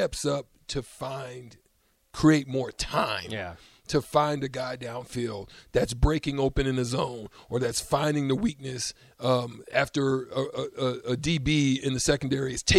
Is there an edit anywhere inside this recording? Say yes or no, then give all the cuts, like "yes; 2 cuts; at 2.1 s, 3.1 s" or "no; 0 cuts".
no; 0 cuts